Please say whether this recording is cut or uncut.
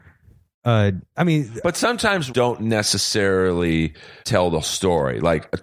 cut